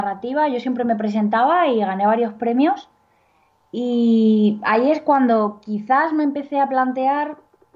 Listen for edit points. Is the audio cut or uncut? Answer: uncut